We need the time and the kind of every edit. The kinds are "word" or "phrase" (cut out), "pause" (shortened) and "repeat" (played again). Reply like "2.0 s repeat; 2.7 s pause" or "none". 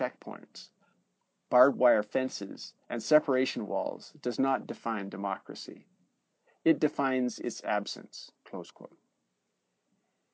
2.8 s pause; 8.3 s pause